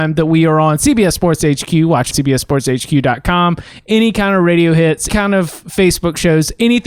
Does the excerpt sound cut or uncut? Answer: cut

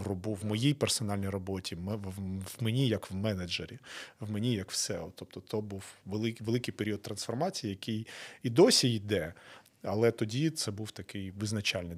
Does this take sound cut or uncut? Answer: uncut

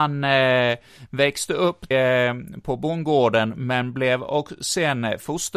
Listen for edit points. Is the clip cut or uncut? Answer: cut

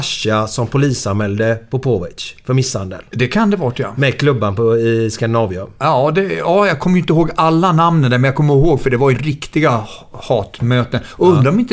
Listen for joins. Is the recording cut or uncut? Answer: cut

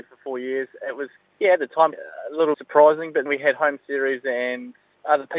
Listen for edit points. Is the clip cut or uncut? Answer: cut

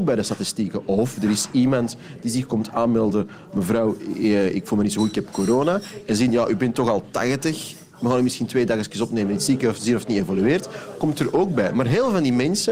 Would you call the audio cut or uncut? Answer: uncut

